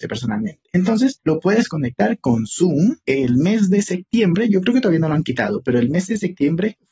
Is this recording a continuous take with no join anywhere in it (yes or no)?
yes